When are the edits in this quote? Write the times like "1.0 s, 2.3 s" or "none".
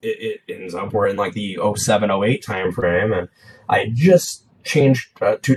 none